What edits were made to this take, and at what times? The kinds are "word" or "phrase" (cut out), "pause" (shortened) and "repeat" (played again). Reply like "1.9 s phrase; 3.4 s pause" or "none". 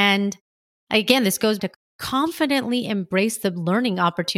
1.6 s word